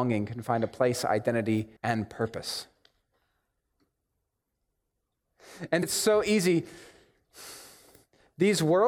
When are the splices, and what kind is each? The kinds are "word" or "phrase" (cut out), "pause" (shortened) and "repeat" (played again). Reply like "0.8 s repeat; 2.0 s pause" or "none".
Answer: 1.8 s pause; 5.8 s word